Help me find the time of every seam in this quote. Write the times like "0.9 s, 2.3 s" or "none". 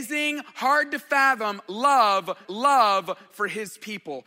2.4 s